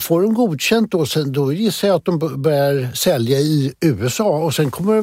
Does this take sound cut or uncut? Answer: uncut